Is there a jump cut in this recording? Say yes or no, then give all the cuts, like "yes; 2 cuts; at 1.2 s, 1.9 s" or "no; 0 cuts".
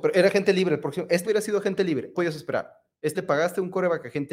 yes; 3 cuts; at 1.2 s, 2.1 s, 3.1 s